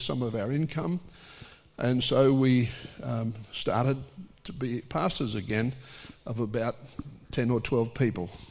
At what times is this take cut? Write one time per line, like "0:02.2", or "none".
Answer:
none